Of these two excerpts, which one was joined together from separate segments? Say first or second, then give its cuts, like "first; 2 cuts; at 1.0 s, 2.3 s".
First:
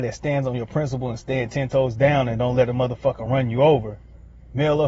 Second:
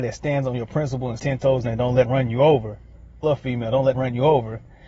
second; 5 cuts; at 1.2 s, 1.6 s, 2.1 s, 3.2 s, 3.9 s